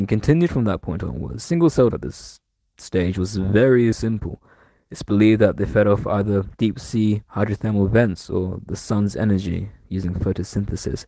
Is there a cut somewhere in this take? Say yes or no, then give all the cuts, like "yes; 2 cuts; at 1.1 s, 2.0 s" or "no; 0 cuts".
yes; 3 cuts; at 1.9 s, 3.9 s, 7.3 s